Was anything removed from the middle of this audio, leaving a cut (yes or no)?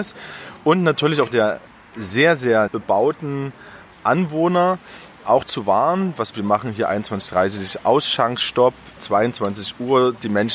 yes